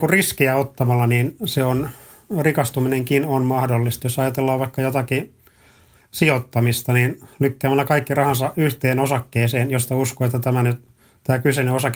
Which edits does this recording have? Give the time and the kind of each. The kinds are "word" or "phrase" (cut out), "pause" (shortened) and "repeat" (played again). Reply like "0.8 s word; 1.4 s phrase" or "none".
none